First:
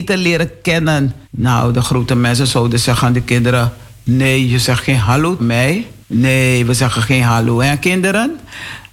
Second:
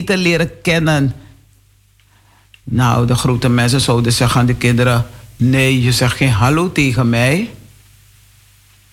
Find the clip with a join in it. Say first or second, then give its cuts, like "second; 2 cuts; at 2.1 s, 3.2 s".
first; 3 cuts; at 1.2 s, 5.4 s, 6.0 s